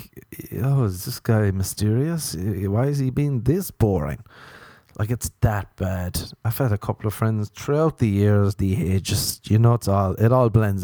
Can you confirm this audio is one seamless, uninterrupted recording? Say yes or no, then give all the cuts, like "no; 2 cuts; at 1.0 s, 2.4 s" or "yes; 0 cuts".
yes; 0 cuts